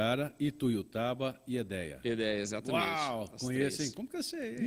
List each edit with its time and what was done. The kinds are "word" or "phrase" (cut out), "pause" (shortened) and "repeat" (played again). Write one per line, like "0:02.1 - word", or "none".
none